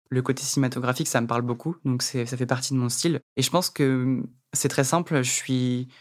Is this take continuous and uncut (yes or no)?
yes